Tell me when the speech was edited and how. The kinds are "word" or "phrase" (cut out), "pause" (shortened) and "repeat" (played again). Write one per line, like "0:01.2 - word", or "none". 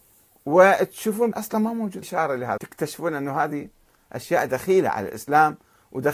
0:01.3 - word
0:02.0 - word
0:02.6 - word